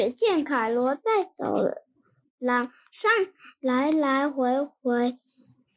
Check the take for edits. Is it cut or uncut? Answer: uncut